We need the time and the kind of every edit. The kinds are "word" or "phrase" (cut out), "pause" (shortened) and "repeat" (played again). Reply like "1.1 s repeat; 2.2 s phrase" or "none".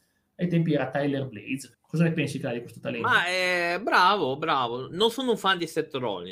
1.7 s word